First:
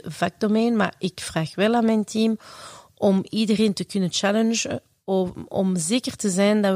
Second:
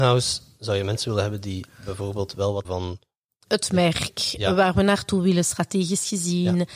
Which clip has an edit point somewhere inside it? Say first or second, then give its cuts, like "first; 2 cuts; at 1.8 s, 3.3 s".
second; 1 cut; at 2.6 s